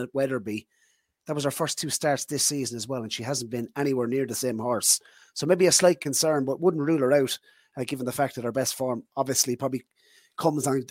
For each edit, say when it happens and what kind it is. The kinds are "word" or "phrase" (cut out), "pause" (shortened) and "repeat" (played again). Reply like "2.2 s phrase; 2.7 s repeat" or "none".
none